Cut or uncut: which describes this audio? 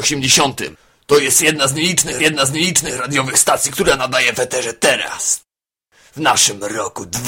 cut